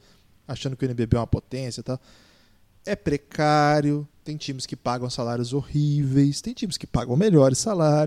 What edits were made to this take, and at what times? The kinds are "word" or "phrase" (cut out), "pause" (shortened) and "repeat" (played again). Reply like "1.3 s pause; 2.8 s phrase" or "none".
none